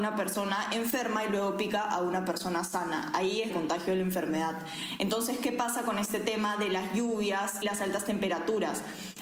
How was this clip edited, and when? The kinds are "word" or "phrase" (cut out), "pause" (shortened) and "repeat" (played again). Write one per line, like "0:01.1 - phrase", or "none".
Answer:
0:03.5 - phrase
0:07.6 - word